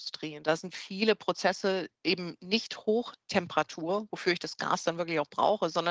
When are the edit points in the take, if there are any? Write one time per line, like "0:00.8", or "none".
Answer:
none